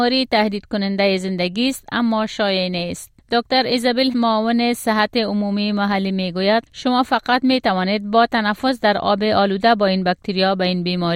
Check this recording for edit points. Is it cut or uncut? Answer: cut